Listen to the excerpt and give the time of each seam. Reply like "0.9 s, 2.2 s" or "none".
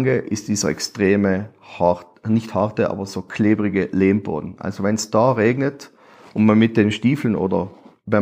none